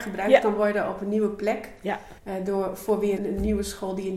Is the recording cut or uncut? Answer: cut